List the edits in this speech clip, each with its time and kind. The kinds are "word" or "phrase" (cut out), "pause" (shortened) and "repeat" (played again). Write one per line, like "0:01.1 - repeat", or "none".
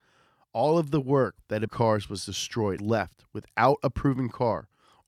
0:01.7 - phrase
0:02.8 - phrase